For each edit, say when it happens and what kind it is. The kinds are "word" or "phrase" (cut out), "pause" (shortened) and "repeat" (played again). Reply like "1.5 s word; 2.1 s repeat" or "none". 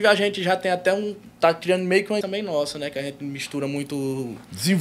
2.2 s word